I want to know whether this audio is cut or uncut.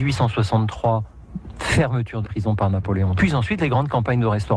cut